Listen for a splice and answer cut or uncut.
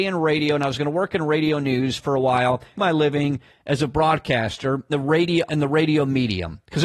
cut